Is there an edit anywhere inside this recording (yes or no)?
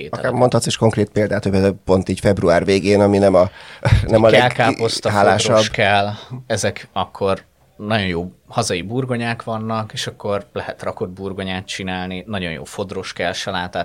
no